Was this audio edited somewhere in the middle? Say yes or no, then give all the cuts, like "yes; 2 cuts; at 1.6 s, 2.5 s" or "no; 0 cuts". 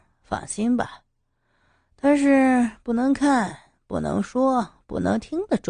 no; 0 cuts